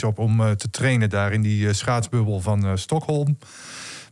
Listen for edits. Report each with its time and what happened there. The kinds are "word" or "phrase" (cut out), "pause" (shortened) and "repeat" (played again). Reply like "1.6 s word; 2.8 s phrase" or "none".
none